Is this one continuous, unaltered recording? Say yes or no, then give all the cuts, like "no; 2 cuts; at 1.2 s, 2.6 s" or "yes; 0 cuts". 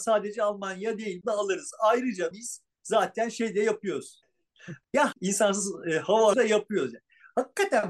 no; 5 cuts; at 1.2 s, 2.3 s, 2.7 s, 5.1 s, 6.3 s